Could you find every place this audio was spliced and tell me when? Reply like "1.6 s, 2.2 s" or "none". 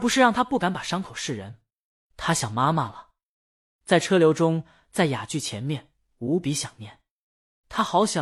none